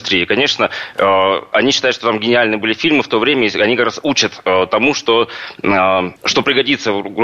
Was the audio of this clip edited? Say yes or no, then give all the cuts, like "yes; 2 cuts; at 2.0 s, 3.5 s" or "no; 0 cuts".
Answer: yes; 1 cut; at 6.2 s